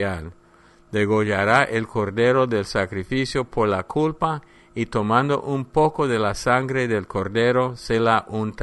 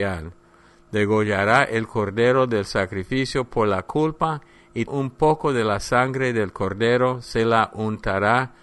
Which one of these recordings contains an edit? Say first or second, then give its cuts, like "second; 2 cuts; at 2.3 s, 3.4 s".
second; 1 cut; at 4.9 s